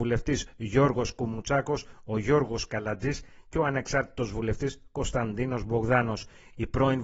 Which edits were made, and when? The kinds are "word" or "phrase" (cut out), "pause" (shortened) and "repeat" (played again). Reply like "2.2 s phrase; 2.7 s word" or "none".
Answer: none